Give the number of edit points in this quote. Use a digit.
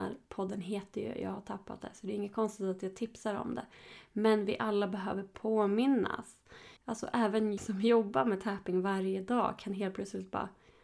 2